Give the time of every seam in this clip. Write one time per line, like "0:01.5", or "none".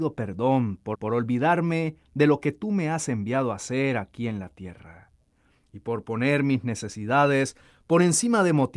0:00.9